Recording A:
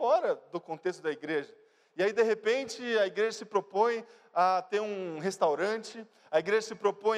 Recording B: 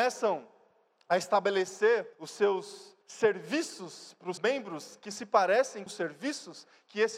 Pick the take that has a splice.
B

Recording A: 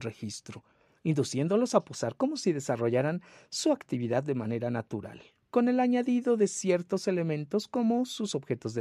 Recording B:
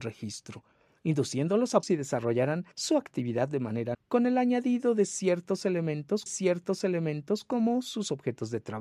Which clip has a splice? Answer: B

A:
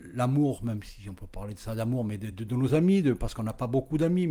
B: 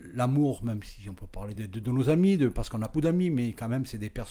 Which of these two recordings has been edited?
B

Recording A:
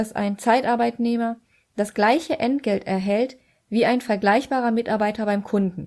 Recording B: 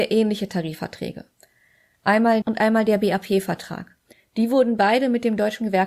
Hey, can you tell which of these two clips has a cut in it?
B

